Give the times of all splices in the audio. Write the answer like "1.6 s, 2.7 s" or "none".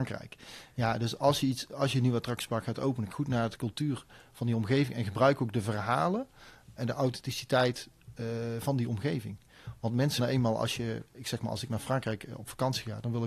3.1 s, 6.8 s, 10.2 s